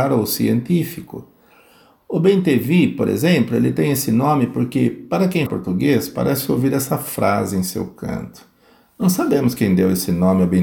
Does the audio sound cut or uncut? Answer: cut